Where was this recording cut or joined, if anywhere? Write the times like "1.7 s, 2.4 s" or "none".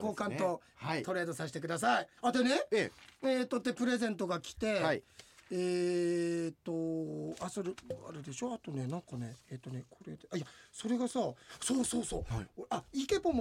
2.2 s, 9.4 s